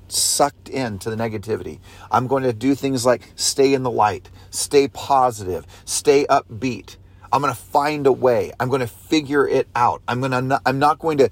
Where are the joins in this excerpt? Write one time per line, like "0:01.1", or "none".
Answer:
none

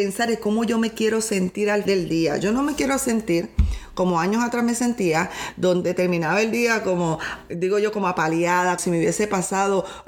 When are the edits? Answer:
0:01.9
0:08.8

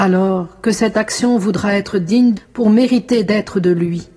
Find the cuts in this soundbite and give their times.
0:02.4

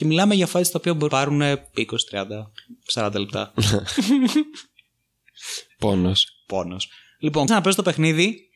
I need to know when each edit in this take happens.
0:01.1
0:07.5

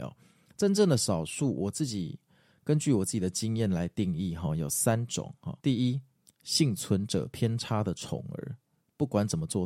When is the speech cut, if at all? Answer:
0:05.6

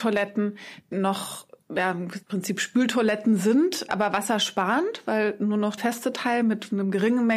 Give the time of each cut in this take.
0:00.9
0:02.2
0:03.9
0:05.8

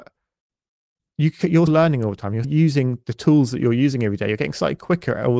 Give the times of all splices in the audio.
0:01.7
0:02.4

